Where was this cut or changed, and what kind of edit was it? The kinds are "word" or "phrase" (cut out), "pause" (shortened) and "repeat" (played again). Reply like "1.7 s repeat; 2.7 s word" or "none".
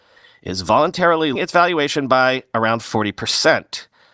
1.4 s word